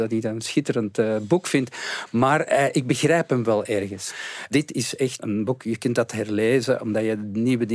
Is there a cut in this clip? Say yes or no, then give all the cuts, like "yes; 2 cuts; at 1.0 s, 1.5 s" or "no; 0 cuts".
no; 0 cuts